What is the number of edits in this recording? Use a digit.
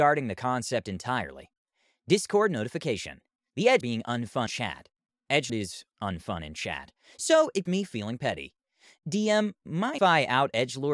6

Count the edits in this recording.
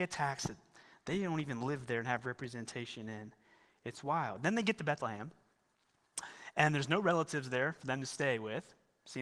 0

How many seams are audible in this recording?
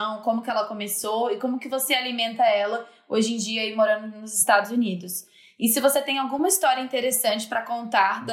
0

